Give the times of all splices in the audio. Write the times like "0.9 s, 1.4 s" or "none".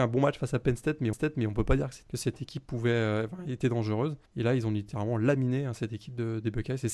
1.1 s, 2.1 s, 4.3 s